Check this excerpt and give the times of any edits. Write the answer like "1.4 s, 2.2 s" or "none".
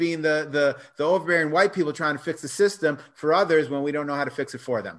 none